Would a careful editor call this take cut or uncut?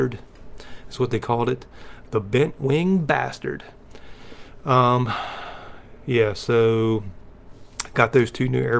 uncut